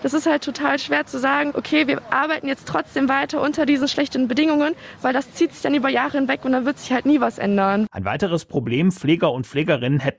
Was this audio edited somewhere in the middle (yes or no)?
no